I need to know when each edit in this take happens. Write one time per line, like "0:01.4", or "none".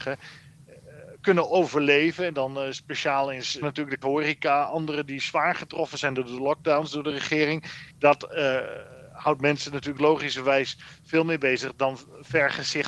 0:03.6
0:04.0
0:07.9